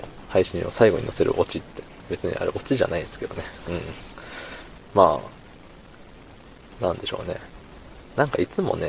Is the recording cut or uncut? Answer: cut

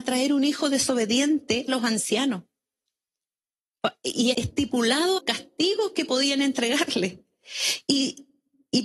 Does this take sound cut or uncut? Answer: cut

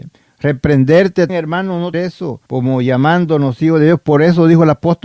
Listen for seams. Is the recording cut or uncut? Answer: cut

